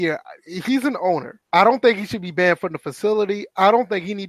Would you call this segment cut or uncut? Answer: cut